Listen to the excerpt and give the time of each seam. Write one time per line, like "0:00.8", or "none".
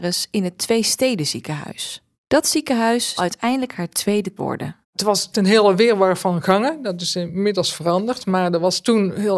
0:02.1
0:03.2
0:04.4
0:04.8
0:05.3